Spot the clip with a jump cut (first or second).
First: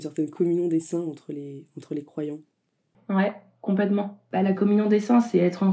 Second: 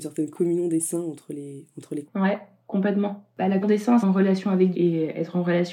second